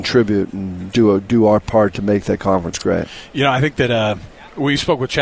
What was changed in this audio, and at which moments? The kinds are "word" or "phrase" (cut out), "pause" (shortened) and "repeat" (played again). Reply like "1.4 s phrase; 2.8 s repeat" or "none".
none